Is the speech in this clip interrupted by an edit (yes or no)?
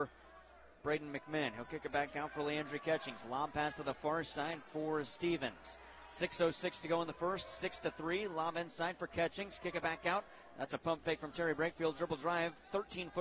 no